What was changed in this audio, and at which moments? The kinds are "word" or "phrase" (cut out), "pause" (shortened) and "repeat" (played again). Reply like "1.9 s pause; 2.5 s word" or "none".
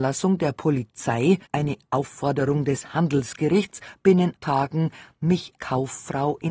1.5 s pause; 4.4 s word; 5.6 s word